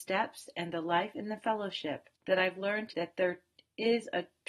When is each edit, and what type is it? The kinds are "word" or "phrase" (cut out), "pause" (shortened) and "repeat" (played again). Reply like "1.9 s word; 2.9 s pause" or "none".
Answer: 2.2 s pause; 2.9 s word